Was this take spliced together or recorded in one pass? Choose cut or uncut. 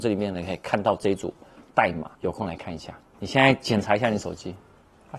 cut